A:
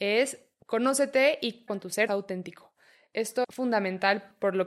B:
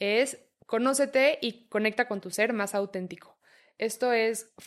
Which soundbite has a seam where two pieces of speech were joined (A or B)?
A